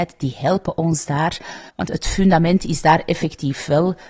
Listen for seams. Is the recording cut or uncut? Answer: cut